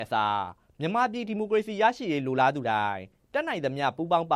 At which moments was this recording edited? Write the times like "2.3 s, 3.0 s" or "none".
none